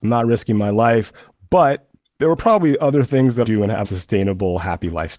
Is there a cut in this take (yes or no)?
yes